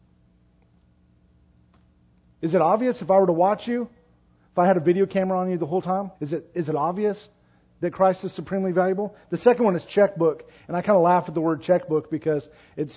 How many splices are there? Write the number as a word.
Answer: one